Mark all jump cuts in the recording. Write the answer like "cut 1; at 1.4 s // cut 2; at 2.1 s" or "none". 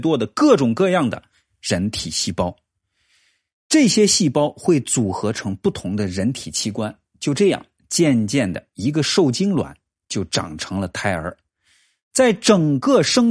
none